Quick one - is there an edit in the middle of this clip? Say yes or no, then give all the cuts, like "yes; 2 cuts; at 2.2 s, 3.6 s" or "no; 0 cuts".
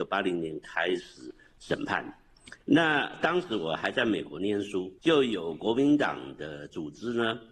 yes; 2 cuts; at 2.6 s, 5.0 s